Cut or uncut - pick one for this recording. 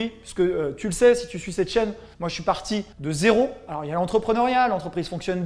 cut